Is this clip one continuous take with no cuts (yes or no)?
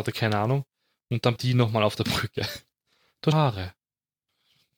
no